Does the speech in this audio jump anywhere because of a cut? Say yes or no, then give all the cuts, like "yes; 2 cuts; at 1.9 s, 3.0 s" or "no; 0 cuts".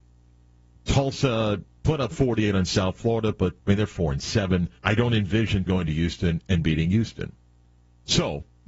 yes; 4 cuts; at 1.8 s, 3.6 s, 4.8 s, 5.7 s